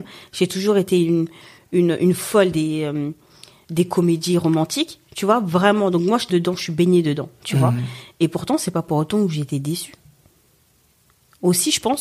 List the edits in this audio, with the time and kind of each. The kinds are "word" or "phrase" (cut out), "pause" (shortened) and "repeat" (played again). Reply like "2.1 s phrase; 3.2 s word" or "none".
6.3 s word